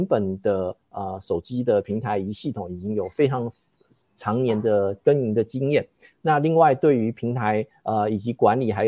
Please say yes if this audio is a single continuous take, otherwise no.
yes